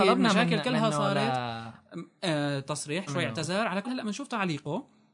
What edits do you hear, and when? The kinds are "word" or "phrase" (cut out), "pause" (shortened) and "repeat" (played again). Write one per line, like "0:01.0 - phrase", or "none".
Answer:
0:03.1 - word
0:03.8 - word